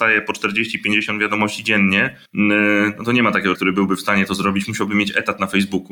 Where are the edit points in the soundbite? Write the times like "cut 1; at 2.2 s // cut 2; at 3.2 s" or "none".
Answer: cut 1; at 2.3 s // cut 2; at 3.5 s

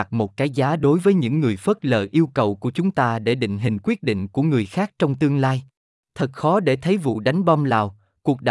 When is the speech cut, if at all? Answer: cut 1; at 6.0 s

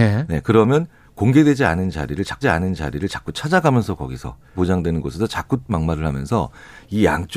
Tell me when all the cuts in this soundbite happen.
cut 1; at 2.4 s // cut 2; at 4.5 s // cut 3; at 5.7 s

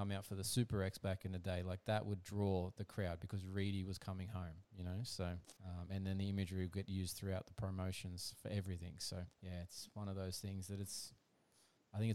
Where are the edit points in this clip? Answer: cut 1; at 4.6 s // cut 2; at 5.6 s // cut 3; at 9.3 s

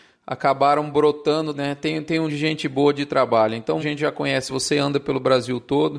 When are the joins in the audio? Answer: cut 1; at 1.5 s // cut 2; at 2.3 s // cut 3; at 3.8 s // cut 4; at 4.5 s

